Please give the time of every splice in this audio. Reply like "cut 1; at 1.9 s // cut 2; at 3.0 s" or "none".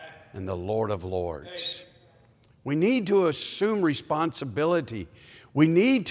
none